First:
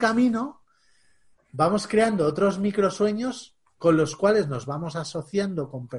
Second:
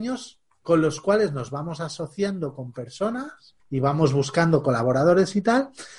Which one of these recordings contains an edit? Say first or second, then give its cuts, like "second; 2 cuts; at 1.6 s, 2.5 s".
second; 1 cut; at 3.6 s